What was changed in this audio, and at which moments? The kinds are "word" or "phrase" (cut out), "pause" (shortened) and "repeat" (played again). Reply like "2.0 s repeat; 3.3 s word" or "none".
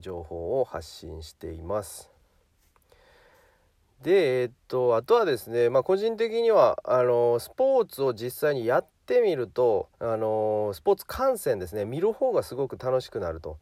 9.9 s pause